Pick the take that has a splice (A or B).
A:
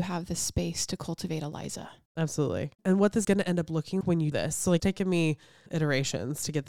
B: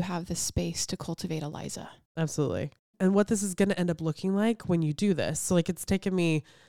A